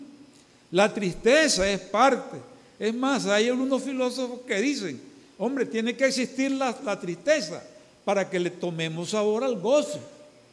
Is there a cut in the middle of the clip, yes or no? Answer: no